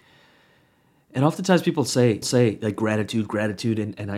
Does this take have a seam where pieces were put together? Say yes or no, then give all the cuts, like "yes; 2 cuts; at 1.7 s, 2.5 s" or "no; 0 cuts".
yes; 1 cut; at 2.2 s